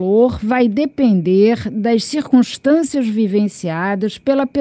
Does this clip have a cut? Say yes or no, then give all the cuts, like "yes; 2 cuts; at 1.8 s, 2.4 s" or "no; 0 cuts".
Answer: no; 0 cuts